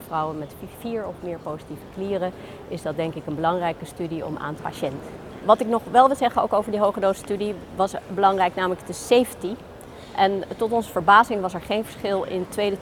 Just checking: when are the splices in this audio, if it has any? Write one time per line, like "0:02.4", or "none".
0:04.6